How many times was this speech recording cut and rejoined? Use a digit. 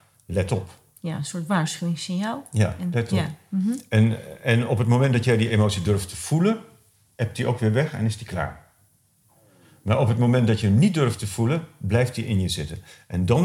0